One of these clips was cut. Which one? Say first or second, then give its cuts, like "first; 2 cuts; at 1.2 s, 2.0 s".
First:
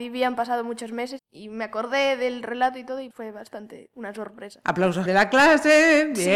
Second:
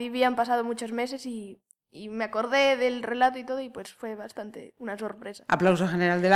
first; 3 cuts; at 1.2 s, 3.1 s, 5.1 s